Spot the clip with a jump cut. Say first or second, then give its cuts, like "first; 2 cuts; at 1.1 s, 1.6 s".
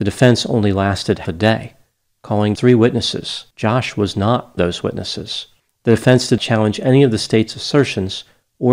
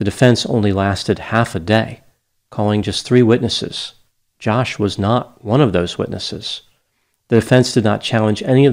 first; 6 cuts; at 1.3 s, 2.6 s, 3.5 s, 4.6 s, 5.6 s, 6.4 s